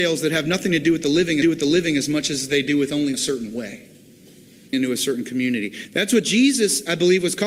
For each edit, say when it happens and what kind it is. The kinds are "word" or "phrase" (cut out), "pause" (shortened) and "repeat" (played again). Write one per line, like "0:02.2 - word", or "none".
0:01.4 - repeat
0:03.1 - word
0:04.7 - word